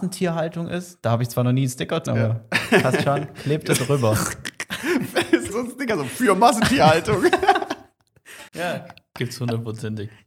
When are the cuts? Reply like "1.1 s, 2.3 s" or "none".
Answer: 2.1 s, 5.5 s, 8.5 s